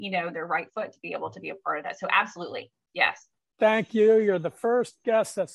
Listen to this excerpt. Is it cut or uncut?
uncut